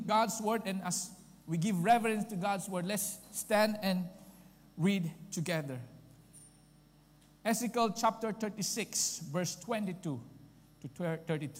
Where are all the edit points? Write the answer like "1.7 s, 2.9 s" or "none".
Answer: none